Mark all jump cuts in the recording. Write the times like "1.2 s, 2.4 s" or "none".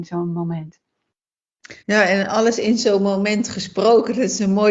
1.8 s